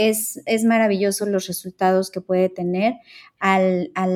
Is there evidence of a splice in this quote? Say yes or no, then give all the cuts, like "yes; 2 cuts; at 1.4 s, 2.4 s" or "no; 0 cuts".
no; 0 cuts